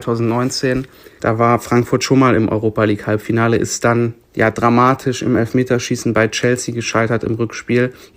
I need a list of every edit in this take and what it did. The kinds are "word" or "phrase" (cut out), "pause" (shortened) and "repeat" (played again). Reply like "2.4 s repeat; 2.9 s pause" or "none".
none